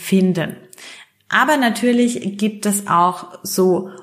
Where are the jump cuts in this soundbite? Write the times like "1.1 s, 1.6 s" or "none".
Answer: none